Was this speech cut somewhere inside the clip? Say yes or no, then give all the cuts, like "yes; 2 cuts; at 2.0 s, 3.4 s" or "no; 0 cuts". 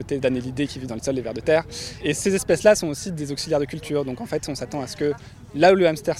no; 0 cuts